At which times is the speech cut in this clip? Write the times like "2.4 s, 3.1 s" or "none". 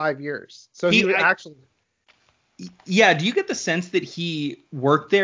none